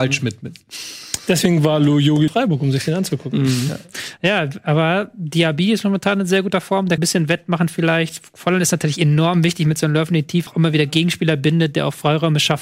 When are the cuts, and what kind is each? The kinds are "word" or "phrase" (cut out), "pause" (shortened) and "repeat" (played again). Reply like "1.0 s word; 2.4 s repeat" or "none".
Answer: 2.3 s phrase; 7.0 s phrase; 10.5 s word